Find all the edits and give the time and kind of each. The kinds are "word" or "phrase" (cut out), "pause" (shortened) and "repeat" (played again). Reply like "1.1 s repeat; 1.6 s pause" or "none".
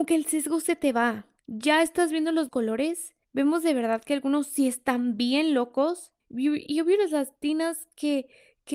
1.4 s pause; 2.5 s word; 3.2 s pause; 6.2 s pause